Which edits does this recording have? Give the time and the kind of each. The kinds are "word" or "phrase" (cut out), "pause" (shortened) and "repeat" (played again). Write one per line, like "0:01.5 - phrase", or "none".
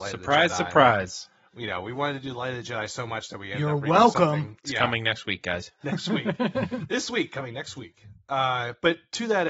none